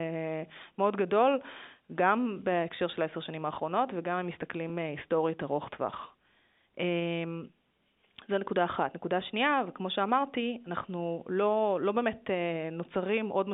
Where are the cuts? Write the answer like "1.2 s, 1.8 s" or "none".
none